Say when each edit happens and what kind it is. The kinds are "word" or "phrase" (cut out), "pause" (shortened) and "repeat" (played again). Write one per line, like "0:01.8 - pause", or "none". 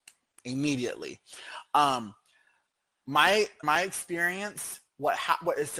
0:03.6 - word